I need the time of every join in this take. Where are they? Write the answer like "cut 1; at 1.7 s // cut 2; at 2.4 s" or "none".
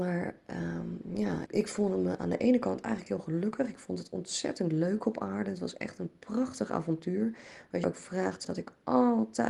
cut 1; at 1.5 s // cut 2; at 7.8 s // cut 3; at 8.4 s